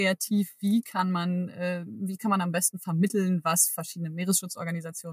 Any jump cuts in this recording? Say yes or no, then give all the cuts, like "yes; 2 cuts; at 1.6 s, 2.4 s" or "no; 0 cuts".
no; 0 cuts